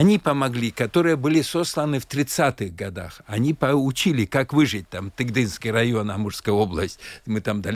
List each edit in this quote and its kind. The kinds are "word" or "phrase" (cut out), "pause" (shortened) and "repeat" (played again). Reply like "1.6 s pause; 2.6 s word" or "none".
none